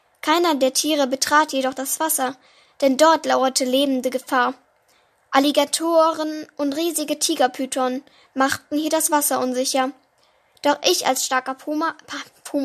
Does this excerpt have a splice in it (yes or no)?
no